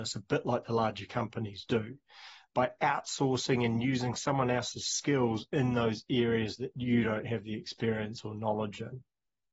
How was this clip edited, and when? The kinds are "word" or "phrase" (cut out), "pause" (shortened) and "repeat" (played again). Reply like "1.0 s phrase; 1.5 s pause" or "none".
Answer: none